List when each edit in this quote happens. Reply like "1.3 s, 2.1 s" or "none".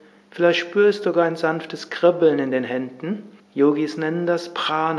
3.4 s